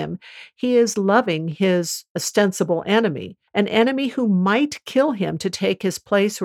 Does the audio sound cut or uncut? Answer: cut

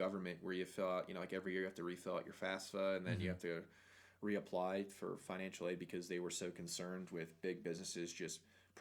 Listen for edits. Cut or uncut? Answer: uncut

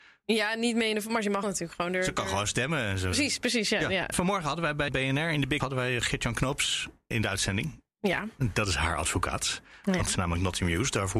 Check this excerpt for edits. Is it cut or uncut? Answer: cut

